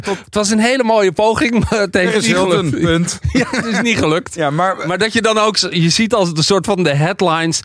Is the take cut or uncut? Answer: uncut